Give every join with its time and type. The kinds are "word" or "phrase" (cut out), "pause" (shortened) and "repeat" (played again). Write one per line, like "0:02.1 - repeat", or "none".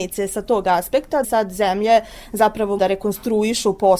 0:01.2 - word
0:02.8 - word